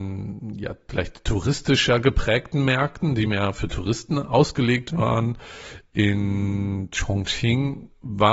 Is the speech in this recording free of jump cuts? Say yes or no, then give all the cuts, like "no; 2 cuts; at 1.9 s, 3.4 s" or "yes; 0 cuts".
yes; 0 cuts